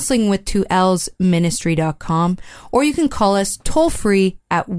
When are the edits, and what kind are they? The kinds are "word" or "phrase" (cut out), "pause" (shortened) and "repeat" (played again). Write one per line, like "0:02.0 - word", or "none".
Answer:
none